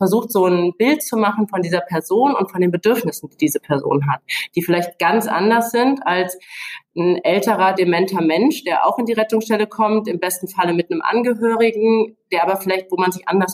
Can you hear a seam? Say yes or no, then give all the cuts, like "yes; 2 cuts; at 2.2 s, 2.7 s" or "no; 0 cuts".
no; 0 cuts